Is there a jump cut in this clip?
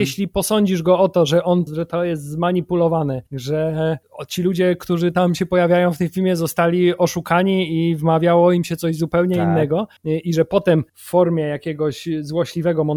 yes; 4 cuts; at 1.7 s, 3.3 s, 10.0 s, 10.9 s

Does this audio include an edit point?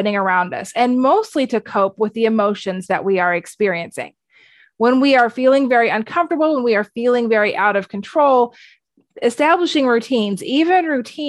no; 0 cuts

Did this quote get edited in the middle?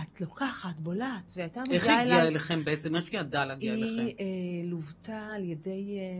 no; 0 cuts

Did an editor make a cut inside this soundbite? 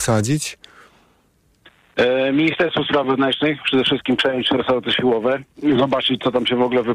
no; 0 cuts

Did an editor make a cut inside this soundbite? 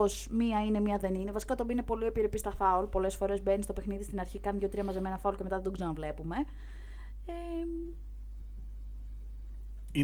no; 0 cuts

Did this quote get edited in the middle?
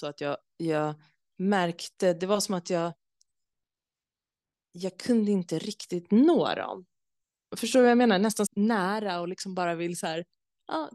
yes; 1 cut; at 8.5 s

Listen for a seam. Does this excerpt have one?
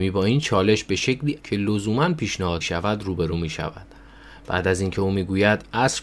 yes; 2 cuts; at 1.4 s, 2.6 s

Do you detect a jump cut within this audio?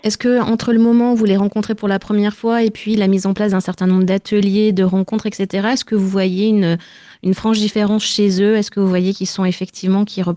no; 0 cuts

